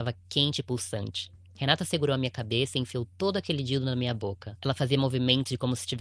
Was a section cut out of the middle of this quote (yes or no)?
yes